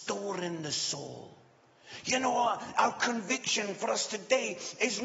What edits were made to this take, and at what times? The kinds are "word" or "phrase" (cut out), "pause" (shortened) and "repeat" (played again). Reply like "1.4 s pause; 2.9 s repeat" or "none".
none